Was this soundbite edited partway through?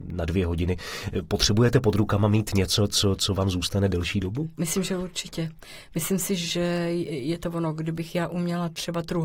no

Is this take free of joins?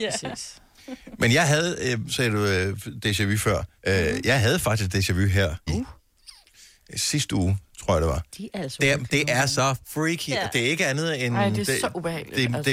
no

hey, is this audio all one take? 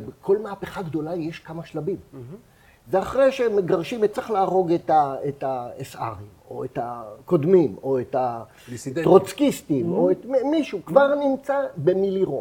no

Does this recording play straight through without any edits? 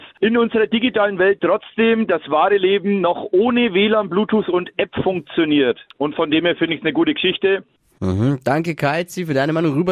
yes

